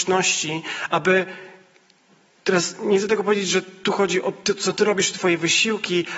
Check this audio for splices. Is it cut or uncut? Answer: uncut